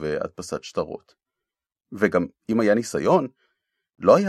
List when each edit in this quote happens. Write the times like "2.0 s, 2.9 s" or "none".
none